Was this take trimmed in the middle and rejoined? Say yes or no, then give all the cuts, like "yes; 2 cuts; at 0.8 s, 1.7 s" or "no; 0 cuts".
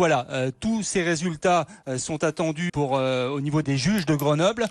yes; 2 cuts; at 2.7 s, 3.6 s